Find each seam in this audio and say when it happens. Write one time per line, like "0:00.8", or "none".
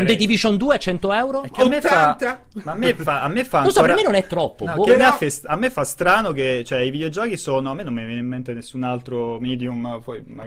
none